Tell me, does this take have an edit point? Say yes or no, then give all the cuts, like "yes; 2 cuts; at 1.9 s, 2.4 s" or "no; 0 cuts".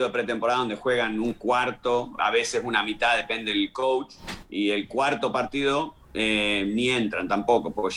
yes; 1 cut; at 2.2 s